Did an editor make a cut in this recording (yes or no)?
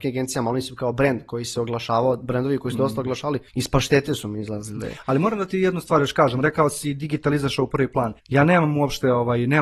yes